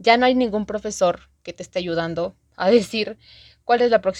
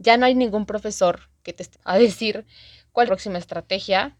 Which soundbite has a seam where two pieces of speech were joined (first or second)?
second